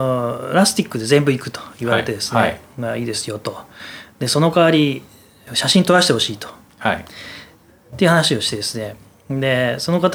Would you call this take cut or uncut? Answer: uncut